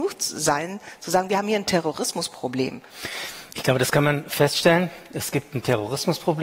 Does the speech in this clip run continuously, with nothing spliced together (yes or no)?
yes